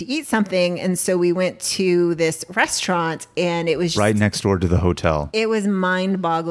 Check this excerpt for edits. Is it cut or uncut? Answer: cut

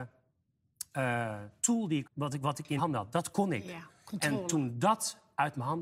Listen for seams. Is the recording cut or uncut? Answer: cut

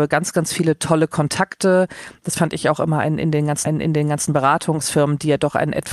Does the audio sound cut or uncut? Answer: cut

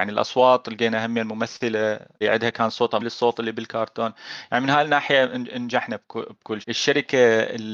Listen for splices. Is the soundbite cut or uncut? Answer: cut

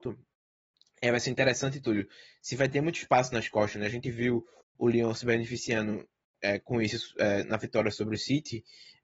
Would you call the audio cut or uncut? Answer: uncut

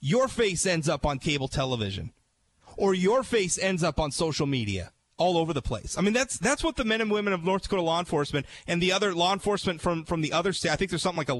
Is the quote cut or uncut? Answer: uncut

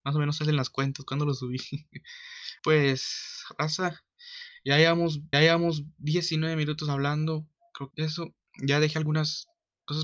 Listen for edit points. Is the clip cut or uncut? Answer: cut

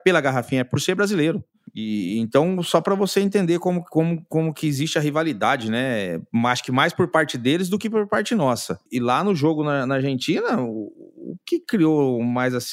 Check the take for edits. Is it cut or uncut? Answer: cut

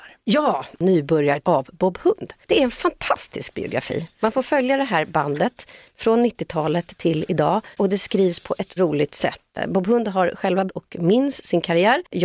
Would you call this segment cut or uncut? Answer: cut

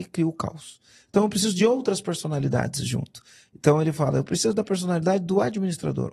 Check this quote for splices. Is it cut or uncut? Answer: uncut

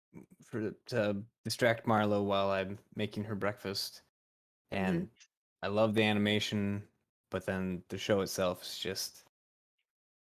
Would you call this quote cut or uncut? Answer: uncut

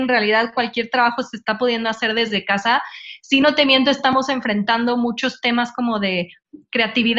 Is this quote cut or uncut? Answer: uncut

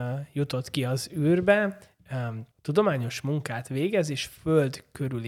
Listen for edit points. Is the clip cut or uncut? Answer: cut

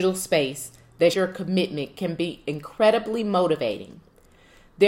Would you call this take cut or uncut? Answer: cut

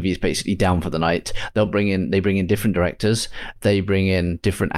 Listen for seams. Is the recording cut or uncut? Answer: uncut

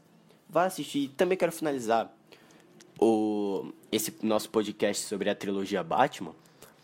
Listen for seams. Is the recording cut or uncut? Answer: uncut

